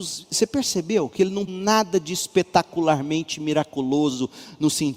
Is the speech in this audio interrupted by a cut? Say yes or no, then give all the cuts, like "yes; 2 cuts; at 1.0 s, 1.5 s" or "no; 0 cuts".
yes; 1 cut; at 1.5 s